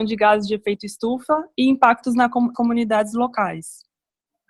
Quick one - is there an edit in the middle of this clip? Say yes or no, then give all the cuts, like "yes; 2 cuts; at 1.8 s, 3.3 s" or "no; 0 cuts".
yes; 1 cut; at 2.5 s